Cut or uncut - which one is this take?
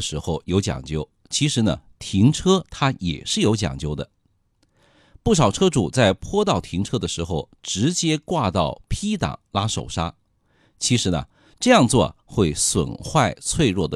uncut